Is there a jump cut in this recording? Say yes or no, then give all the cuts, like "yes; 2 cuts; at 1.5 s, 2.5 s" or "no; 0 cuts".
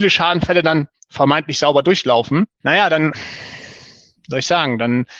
no; 0 cuts